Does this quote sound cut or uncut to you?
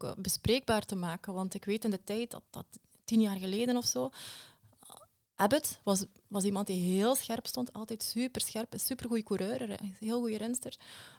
uncut